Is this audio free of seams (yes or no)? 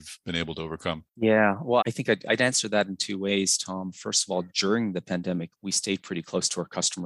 no